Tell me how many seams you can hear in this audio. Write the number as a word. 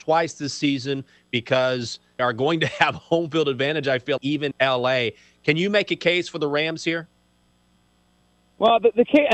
three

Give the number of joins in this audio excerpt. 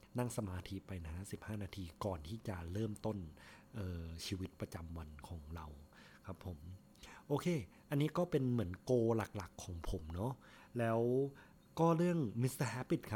zero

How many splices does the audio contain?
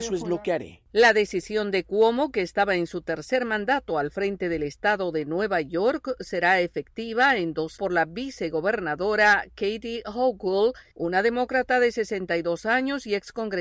one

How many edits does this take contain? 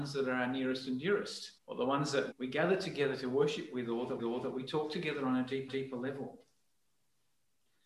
four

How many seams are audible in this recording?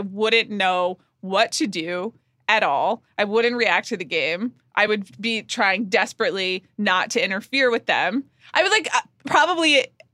zero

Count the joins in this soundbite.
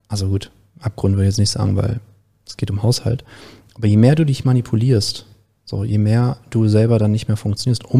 zero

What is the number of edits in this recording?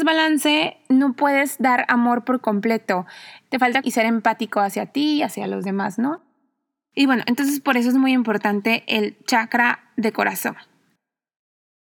one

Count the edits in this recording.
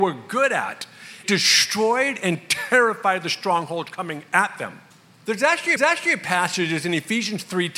three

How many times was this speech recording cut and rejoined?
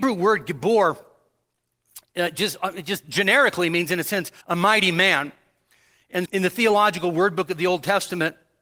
two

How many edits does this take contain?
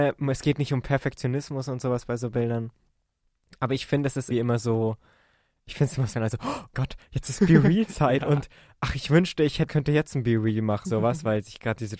five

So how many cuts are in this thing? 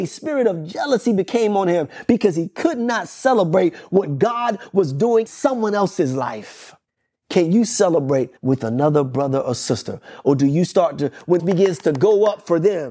four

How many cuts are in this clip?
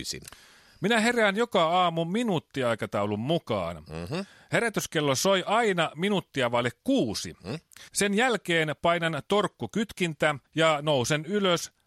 two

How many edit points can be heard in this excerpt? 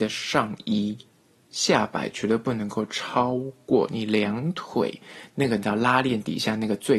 zero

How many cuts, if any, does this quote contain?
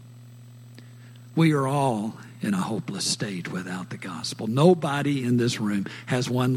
zero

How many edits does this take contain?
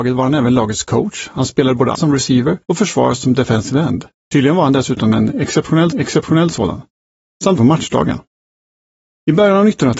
four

